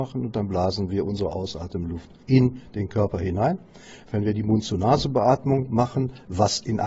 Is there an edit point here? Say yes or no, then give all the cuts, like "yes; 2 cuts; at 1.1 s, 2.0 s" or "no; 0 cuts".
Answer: no; 0 cuts